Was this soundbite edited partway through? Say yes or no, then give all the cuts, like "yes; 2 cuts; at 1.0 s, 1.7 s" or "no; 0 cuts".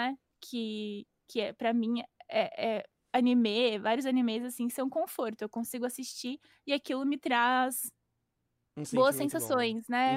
no; 0 cuts